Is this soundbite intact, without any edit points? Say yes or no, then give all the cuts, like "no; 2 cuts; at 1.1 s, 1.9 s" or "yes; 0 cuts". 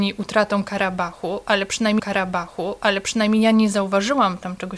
no; 1 cut; at 2.0 s